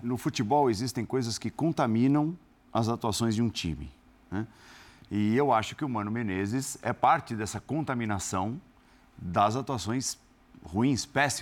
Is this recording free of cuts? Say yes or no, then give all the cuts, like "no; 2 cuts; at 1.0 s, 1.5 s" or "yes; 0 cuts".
no; 1 cut; at 4.1 s